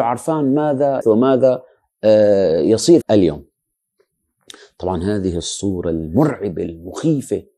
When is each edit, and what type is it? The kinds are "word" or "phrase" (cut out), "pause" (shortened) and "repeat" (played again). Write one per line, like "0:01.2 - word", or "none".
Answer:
0:01.0 - word
0:03.0 - phrase

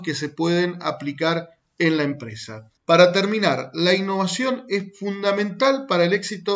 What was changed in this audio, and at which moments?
0:02.8 - pause

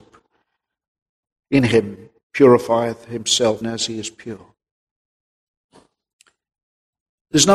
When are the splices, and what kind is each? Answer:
0:03.6 - word

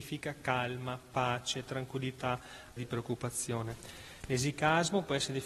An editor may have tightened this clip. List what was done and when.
0:02.8 - word

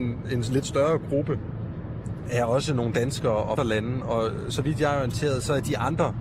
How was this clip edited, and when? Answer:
0:03.6 - phrase

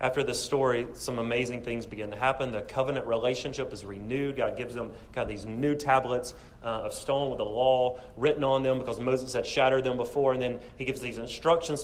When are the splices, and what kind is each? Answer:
none

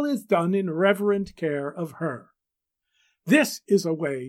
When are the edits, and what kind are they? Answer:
none

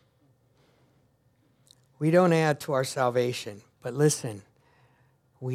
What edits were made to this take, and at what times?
none

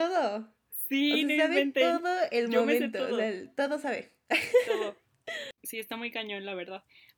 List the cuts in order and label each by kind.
none

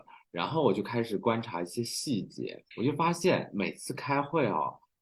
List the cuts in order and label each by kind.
0:02.7 - pause

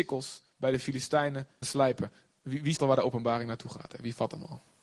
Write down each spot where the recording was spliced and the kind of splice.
0:01.6 - word
0:02.8 - word

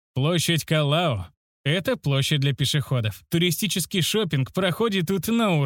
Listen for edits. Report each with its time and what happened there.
none

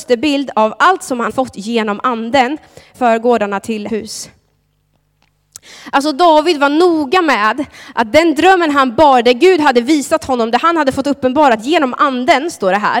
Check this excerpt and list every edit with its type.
0:01.3 - word
0:02.9 - word
0:03.9 - word

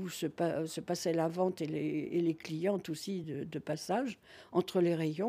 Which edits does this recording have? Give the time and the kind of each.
none

